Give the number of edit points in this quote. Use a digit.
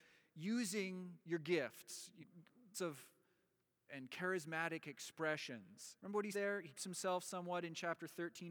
7